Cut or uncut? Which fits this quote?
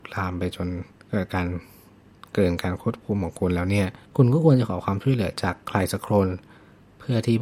cut